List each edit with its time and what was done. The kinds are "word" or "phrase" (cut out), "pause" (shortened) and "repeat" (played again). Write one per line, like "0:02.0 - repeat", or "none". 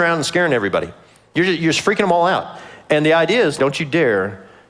0:03.6 - word